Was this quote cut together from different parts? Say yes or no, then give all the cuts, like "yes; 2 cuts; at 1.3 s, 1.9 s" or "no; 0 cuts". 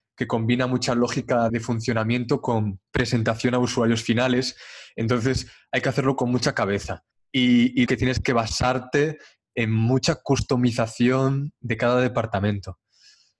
yes; 4 cuts; at 1.5 s, 2.9 s, 7.1 s, 7.9 s